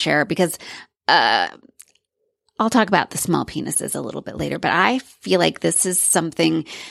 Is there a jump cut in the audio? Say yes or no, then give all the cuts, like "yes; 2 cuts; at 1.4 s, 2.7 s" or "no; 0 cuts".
no; 0 cuts